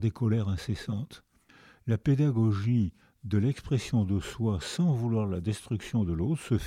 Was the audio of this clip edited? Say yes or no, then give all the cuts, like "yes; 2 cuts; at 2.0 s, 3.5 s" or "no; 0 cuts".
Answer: no; 0 cuts